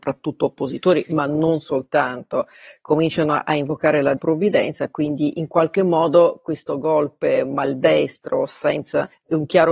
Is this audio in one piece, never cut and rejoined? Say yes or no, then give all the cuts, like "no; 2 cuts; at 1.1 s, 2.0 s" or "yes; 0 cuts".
no; 1 cut; at 4.2 s